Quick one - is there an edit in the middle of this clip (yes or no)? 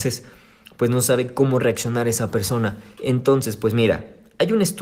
yes